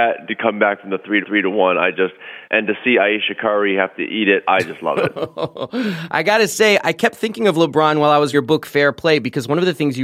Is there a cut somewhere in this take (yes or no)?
yes